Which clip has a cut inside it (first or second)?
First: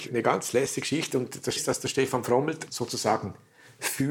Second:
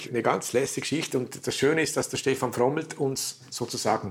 first